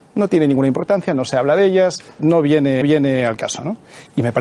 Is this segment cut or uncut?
cut